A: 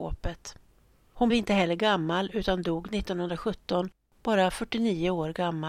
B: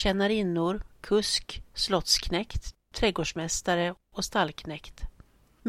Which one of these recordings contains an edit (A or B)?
A